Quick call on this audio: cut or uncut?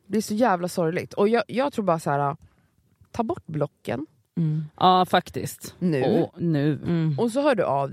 uncut